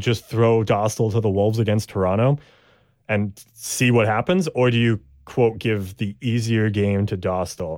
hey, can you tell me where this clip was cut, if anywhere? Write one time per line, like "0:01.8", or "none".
none